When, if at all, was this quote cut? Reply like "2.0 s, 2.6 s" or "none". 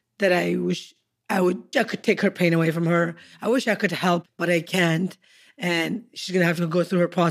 1.7 s, 4.3 s